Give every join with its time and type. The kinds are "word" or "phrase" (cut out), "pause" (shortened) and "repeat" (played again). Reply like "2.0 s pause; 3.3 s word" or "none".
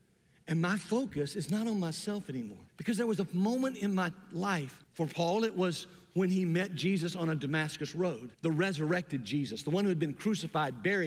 2.7 s pause; 4.8 s pause; 8.3 s pause